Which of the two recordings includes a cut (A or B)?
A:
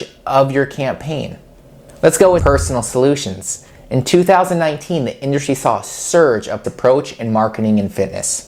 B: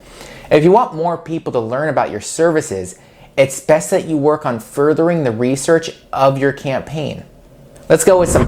A